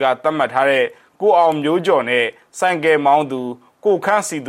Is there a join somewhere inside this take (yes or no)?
no